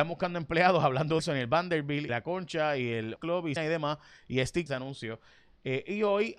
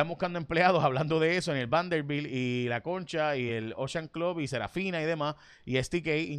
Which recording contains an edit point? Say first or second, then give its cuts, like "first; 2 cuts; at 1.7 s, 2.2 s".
first; 5 cuts; at 1.2 s, 2.1 s, 3.2 s, 3.6 s, 4.7 s